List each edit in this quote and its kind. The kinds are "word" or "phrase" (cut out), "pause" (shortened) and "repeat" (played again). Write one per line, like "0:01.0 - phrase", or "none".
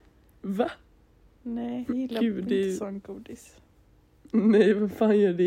0:01.9 - word